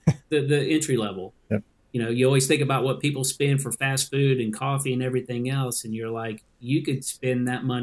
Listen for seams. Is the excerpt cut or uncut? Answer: uncut